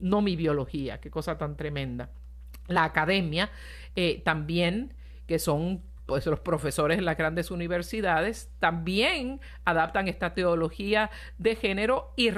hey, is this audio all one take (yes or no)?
yes